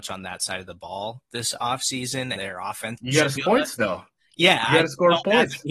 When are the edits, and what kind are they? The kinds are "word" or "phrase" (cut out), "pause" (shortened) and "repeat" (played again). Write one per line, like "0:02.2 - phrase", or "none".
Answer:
0:02.4 - word
0:03.0 - word
0:03.4 - word